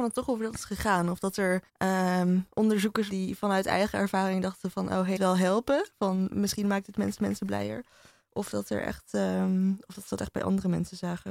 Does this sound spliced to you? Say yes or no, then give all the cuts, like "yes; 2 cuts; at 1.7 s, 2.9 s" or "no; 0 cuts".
yes; 4 cuts; at 1.7 s, 3.1 s, 5.2 s, 7.2 s